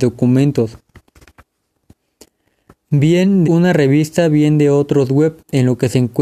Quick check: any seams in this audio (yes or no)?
yes